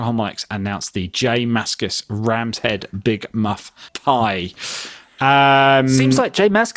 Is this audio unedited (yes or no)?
no